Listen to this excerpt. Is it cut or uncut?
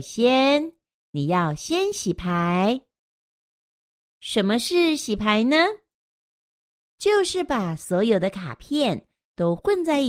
uncut